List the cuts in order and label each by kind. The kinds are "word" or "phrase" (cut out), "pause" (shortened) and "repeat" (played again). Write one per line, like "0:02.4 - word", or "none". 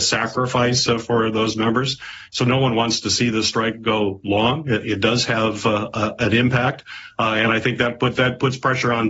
none

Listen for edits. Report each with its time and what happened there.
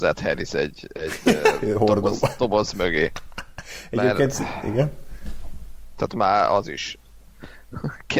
none

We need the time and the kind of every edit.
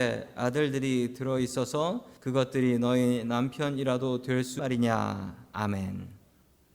0:02.2 - pause
0:04.6 - word

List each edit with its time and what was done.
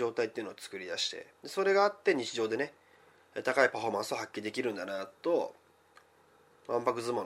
0:01.3 - pause

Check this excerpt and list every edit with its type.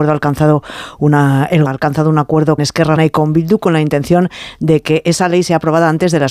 0:01.7 - word
0:02.6 - word
0:03.0 - word

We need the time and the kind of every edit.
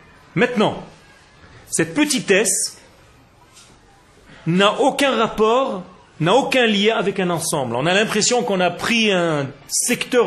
none

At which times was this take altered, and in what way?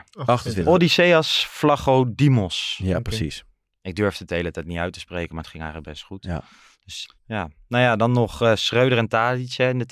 0:07.0 - word

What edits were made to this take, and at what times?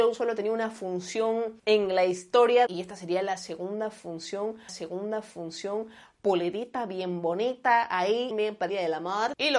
0:01.6 - pause
0:02.7 - phrase
0:04.7 - repeat
0:08.3 - phrase
0:08.7 - word

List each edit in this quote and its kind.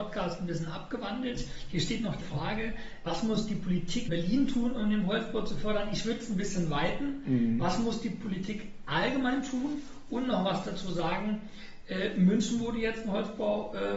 0:02.2 - word
0:03.1 - word
0:04.1 - word

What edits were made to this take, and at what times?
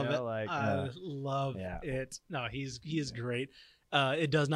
none

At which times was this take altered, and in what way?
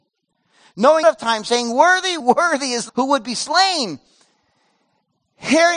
0:01.0 - word
0:02.2 - word
0:02.9 - word

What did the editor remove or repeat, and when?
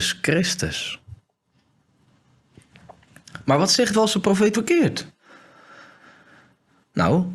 0:03.9 - word
0:04.5 - word

